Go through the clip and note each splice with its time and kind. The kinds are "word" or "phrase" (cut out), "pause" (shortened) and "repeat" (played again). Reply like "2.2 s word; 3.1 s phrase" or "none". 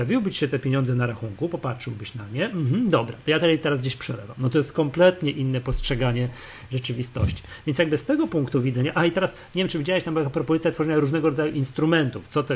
none